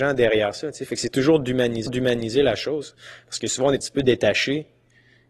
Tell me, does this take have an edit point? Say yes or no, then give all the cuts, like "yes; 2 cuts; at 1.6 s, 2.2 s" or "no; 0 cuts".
yes; 2 cuts; at 1.9 s, 3.8 s